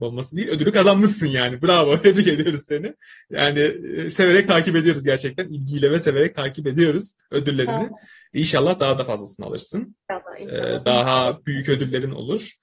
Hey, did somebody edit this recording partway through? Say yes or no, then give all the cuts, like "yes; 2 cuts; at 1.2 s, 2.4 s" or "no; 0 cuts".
no; 0 cuts